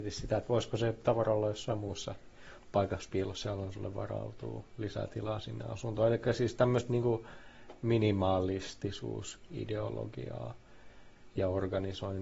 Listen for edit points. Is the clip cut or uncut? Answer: uncut